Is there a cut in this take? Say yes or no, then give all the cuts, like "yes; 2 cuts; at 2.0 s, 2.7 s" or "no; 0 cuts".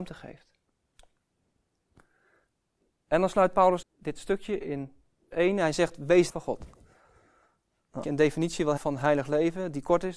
yes; 5 cuts; at 3.8 s, 5.3 s, 6.3 s, 8.0 s, 8.8 s